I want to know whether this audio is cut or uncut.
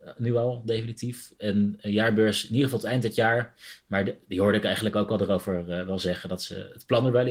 uncut